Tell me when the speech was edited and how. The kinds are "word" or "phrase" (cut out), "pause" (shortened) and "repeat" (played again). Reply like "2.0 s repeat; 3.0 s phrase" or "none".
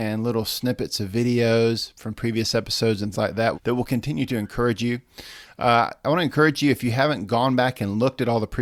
3.1 s word; 3.5 s word